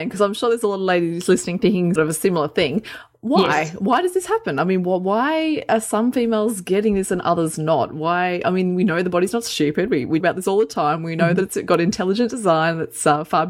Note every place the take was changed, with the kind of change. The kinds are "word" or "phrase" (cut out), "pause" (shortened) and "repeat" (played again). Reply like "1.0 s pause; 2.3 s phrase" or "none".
2.0 s word; 10.2 s word